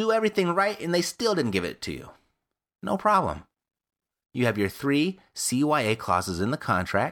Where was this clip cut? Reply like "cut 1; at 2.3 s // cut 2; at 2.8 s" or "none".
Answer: none